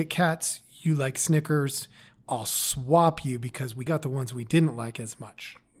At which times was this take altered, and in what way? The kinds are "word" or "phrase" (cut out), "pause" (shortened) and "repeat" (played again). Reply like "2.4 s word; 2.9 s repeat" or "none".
3.9 s phrase